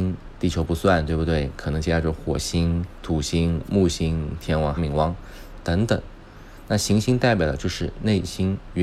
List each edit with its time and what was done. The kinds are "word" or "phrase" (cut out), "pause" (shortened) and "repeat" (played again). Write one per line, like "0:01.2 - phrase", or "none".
0:04.8 - phrase

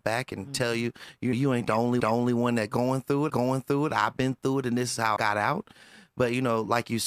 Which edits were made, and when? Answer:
0:01.3 - word
0:02.0 - repeat
0:03.3 - repeat
0:05.2 - word

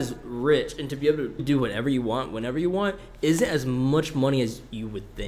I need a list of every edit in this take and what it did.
0:01.4 - word

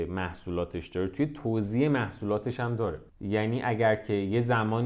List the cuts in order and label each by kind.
0:03.1 - pause

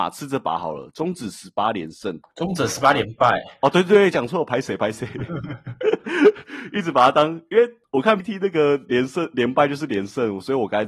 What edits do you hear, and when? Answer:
0:08.2 - word

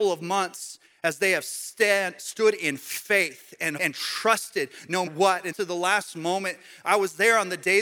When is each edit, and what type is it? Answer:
0:03.8 - word
0:05.1 - word
0:05.5 - phrase

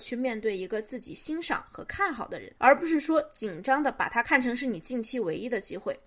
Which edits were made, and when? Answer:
0:02.6 - pause

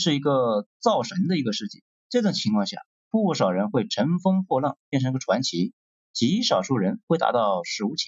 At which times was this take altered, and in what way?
0:02.0 - pause
0:05.8 - pause

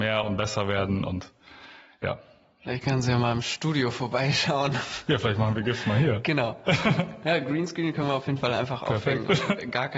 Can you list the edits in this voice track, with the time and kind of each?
none

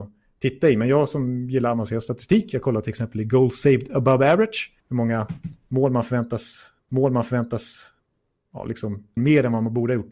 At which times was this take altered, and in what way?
0:04.8 - pause
0:06.9 - repeat
0:09.2 - phrase

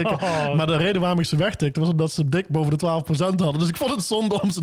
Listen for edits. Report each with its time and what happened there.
none

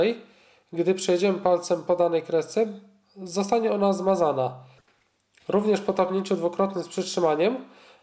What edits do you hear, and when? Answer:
none

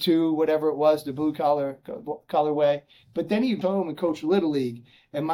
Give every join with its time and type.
0:03.6 - word

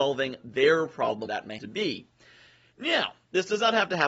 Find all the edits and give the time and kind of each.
0:01.3 - word
0:01.6 - word

